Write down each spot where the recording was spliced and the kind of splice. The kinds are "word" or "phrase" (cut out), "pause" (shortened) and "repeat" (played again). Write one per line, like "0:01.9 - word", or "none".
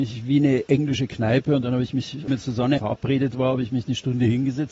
0:02.3 - phrase
0:02.8 - word